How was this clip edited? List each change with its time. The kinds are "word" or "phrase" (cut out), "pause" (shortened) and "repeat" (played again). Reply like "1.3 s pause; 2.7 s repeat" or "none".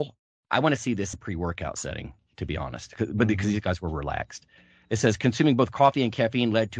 1.1 s word